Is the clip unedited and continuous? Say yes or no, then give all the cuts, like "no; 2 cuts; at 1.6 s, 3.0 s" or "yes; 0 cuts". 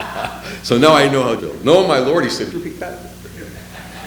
no; 2 cuts; at 1.4 s, 2.5 s